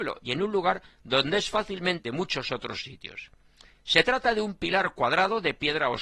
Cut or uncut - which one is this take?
cut